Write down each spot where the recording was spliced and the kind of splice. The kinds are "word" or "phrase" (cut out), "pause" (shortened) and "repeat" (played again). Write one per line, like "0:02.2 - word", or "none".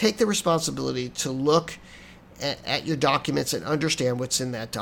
none